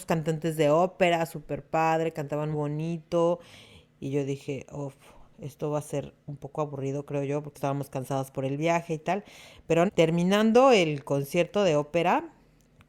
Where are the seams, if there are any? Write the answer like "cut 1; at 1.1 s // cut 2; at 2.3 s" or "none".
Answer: cut 1; at 2.5 s // cut 2; at 7.5 s // cut 3; at 9.9 s